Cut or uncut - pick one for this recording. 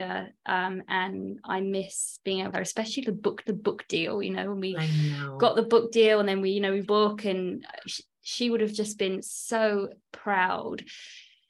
cut